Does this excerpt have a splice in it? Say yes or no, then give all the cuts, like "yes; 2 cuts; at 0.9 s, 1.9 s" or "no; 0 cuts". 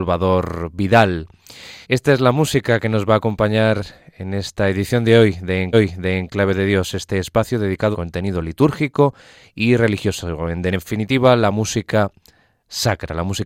yes; 3 cuts; at 1.8 s, 5.7 s, 7.9 s